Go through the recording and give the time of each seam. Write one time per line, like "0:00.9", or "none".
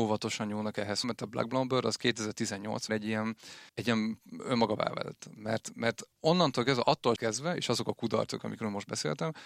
0:01.0
0:02.9
0:03.7
0:04.8
0:06.1
0:07.2

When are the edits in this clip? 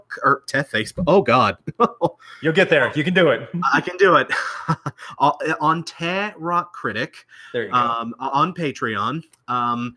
none

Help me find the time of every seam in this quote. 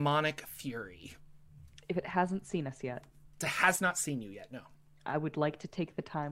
0:03.3

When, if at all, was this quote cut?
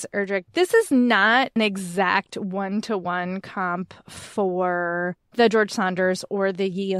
0:01.6

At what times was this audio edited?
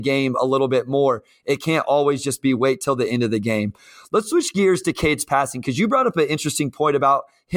none

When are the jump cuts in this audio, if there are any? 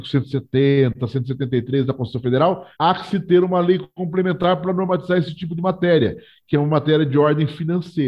0:02.7

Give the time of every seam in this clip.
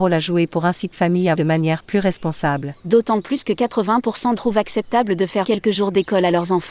0:00.9
0:01.4
0:02.8
0:04.4
0:05.4

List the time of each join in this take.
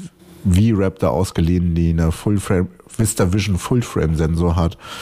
none

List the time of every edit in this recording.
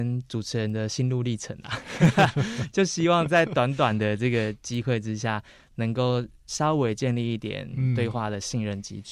none

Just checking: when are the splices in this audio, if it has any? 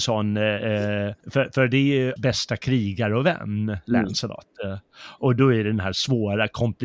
0:01.2
0:02.2

